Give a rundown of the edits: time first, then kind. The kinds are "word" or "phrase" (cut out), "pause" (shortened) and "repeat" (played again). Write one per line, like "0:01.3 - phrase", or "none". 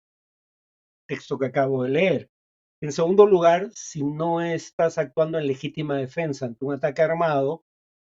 none